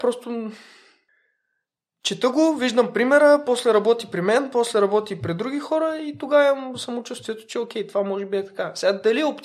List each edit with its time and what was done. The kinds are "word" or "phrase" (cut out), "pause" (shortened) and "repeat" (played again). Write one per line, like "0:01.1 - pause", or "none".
none